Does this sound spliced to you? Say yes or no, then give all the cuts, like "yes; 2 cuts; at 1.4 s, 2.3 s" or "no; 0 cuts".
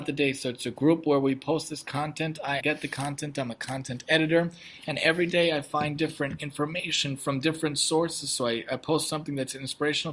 yes; 1 cut; at 2.6 s